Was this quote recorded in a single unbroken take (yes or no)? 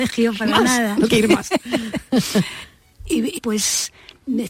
no